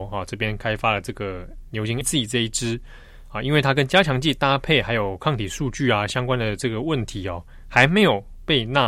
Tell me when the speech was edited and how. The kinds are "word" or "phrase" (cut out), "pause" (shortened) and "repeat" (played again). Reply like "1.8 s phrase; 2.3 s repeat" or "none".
2.0 s word